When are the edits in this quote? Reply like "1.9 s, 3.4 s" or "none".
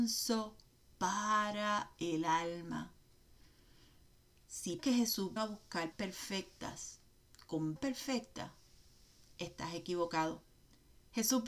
4.8 s, 5.4 s, 5.9 s, 7.8 s